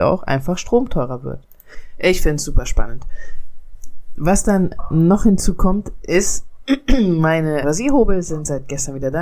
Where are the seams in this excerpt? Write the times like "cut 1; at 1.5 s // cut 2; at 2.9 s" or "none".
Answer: cut 1; at 7.6 s